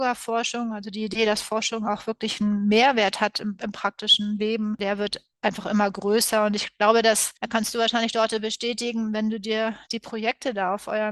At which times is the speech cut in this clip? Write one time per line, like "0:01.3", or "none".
0:09.8